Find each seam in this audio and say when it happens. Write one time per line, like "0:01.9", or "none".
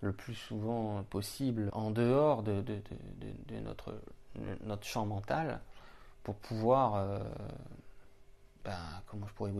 0:01.7